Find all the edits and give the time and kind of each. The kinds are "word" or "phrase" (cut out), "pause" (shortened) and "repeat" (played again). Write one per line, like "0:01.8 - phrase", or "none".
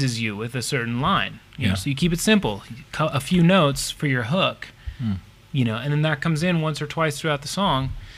none